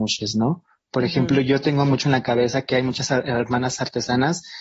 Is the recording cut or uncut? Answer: uncut